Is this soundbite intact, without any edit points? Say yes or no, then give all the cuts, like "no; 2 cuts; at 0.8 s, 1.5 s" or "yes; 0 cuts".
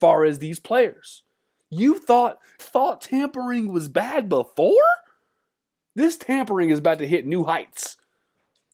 no; 1 cut; at 2.6 s